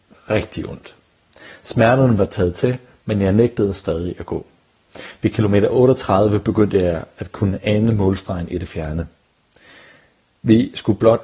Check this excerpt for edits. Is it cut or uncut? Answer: uncut